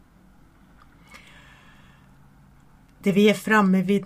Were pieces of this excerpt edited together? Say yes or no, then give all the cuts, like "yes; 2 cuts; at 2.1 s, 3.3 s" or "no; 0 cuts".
no; 0 cuts